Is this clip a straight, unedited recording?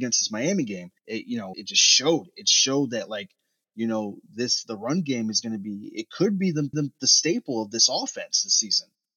no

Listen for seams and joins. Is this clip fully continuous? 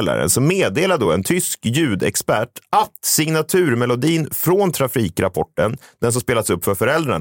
yes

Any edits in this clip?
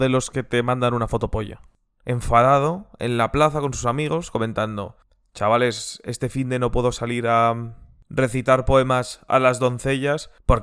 no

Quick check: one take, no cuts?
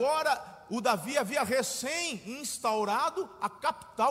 yes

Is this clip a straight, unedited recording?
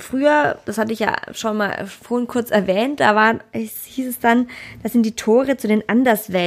yes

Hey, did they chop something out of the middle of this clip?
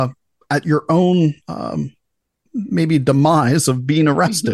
no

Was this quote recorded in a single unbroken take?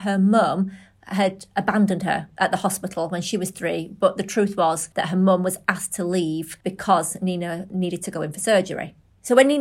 no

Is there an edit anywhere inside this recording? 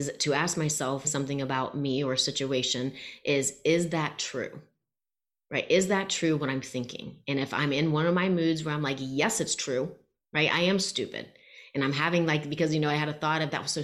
yes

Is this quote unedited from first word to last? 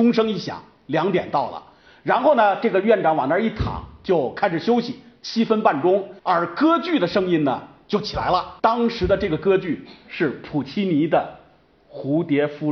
no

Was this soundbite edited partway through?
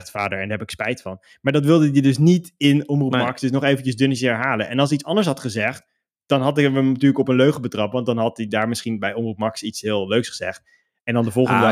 no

